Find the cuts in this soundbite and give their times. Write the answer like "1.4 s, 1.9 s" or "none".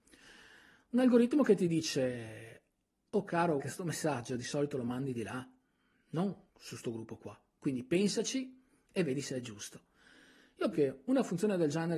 3.6 s, 6.5 s, 10.7 s